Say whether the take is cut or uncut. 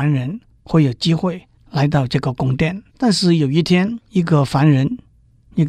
cut